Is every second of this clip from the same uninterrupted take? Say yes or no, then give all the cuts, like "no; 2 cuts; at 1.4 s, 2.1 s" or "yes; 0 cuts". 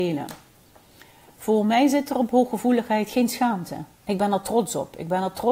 no; 1 cut; at 3.9 s